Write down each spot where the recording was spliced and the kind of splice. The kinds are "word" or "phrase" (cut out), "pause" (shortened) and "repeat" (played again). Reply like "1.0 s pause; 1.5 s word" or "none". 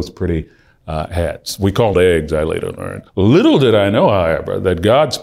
1.9 s phrase; 3.1 s pause